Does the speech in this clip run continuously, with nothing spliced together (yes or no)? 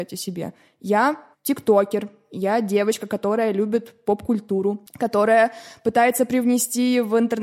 no